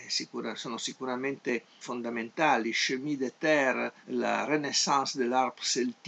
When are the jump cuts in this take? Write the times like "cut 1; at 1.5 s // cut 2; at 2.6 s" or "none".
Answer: cut 1; at 1.8 s // cut 2; at 4.0 s